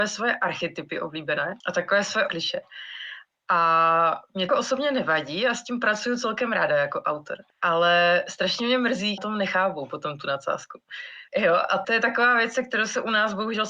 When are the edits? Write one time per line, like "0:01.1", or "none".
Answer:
0:01.6
0:02.3
0:04.5
0:07.5
0:09.2
0:11.3
0:11.8